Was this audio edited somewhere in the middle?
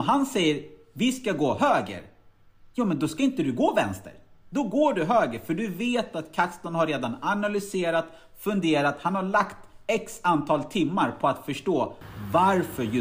no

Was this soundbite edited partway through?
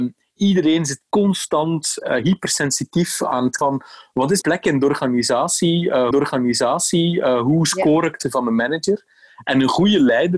yes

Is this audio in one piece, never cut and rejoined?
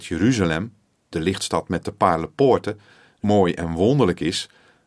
no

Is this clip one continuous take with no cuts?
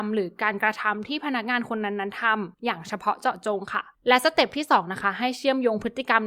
no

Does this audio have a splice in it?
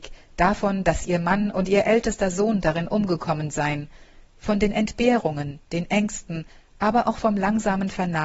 no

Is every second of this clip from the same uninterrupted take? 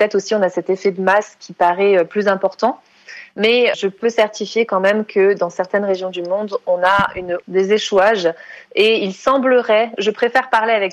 no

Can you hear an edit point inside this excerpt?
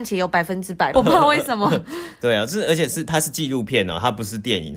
yes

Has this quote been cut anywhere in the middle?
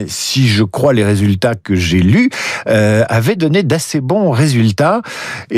no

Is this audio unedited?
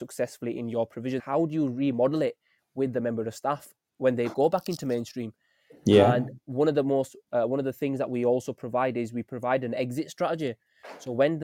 no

